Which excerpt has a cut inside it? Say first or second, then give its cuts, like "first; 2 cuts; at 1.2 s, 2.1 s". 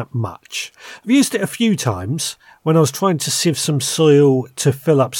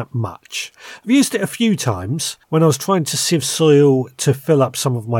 second; 2 cuts; at 2.4 s, 3.4 s